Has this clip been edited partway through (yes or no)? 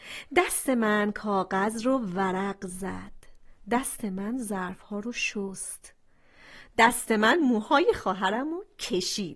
no